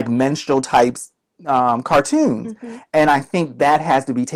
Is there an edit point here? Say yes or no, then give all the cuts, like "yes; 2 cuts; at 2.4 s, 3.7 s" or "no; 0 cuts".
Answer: no; 0 cuts